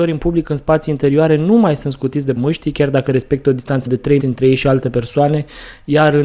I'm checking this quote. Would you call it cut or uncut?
cut